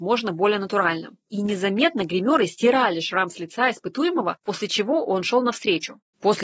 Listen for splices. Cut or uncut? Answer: uncut